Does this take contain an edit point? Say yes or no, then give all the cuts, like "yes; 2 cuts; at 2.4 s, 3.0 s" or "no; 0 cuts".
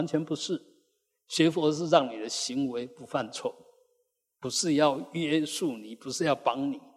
no; 0 cuts